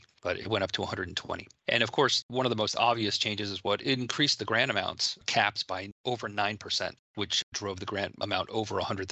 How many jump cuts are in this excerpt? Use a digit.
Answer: 0